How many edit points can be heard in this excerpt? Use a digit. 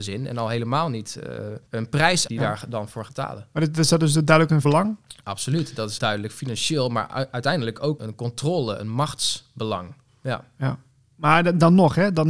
7